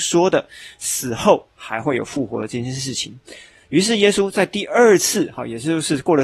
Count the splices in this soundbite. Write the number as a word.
zero